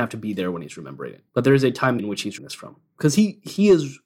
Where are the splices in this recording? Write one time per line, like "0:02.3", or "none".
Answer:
0:01.3
0:02.0
0:02.4